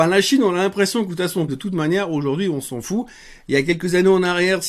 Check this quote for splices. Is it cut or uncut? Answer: cut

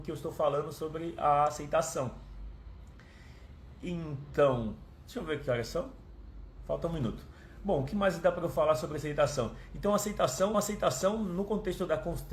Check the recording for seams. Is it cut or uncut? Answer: cut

